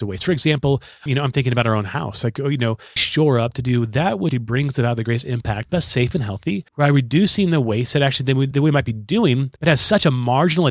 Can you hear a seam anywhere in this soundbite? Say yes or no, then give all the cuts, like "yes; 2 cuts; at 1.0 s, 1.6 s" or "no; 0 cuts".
yes; 7 cuts; at 1.1 s, 3.0 s, 4.3 s, 5.7 s, 6.7 s, 8.5 s, 9.6 s